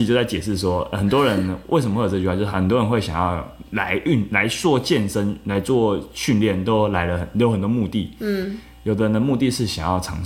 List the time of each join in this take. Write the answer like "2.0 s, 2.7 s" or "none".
3.7 s